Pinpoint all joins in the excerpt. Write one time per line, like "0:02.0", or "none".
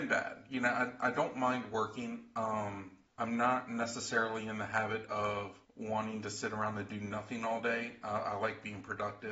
0:03.1
0:05.6